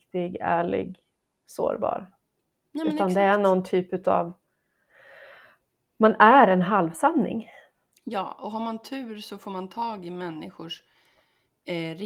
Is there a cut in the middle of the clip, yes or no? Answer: no